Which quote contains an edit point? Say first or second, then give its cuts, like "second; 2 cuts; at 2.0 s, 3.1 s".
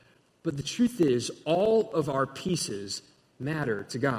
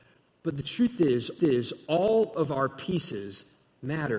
second; 1 cut; at 1.4 s